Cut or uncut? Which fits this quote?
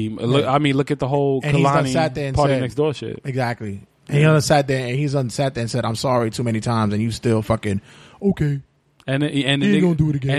uncut